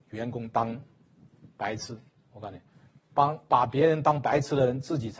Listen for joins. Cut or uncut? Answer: uncut